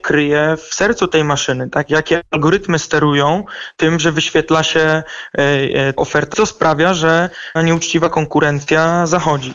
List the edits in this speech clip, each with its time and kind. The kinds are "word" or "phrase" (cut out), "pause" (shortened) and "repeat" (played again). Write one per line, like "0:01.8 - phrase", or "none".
0:06.0 - word
0:06.3 - phrase
0:07.6 - word